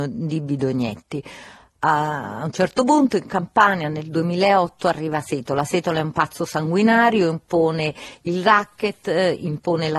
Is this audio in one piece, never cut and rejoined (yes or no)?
yes